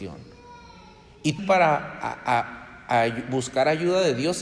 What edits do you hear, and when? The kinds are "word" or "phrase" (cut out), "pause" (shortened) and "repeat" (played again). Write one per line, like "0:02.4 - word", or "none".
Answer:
0:01.4 - phrase